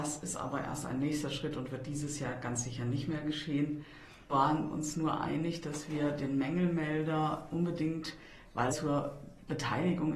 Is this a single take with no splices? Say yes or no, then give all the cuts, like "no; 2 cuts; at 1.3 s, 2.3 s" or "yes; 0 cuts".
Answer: no; 2 cuts; at 4.3 s, 8.7 s